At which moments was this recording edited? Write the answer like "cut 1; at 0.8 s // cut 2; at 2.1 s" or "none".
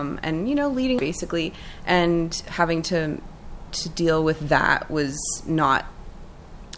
cut 1; at 1.0 s